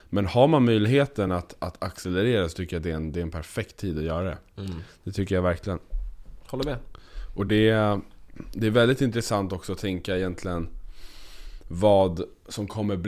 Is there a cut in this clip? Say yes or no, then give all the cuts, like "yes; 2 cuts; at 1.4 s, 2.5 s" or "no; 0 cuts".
no; 0 cuts